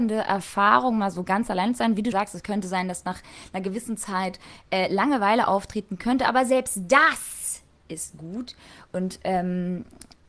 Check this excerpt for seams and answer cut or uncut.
cut